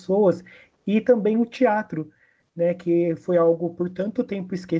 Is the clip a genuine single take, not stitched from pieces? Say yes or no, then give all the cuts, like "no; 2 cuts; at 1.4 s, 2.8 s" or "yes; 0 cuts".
yes; 0 cuts